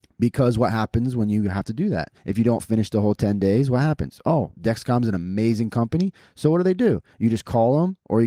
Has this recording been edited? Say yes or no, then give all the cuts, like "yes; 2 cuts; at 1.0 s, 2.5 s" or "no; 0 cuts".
yes; 2 cuts; at 2.2 s, 4.5 s